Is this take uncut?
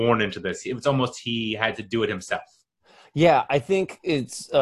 yes; 0 cuts

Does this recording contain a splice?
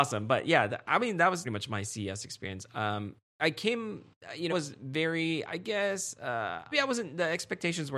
yes; 3 cuts; at 1.4 s, 4.5 s, 6.7 s

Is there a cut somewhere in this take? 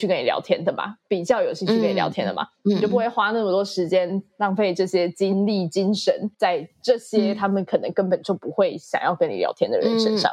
yes; 1 cut; at 6.3 s

